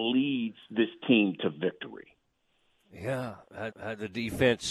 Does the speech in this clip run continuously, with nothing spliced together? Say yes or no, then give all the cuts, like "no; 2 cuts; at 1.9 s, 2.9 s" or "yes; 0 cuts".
no; 1 cut; at 3.7 s